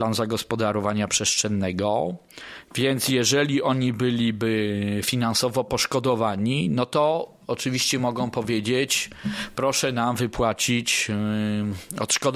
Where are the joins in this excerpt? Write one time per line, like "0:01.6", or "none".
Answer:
none